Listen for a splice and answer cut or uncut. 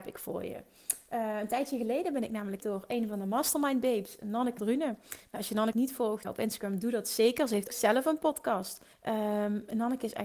cut